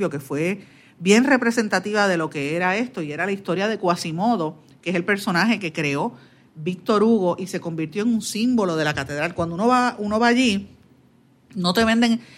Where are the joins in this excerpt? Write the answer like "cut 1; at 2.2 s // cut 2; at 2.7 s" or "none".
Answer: none